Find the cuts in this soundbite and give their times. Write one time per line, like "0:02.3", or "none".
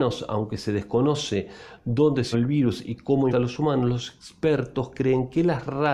0:02.3
0:03.3